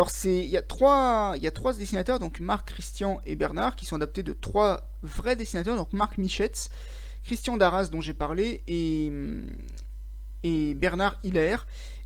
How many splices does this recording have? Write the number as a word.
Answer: zero